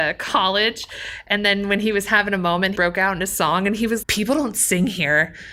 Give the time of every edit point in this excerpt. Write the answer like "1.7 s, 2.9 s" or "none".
2.8 s, 4.0 s